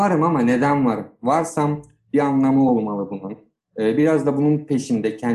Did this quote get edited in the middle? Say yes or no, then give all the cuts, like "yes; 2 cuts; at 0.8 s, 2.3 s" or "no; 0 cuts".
no; 0 cuts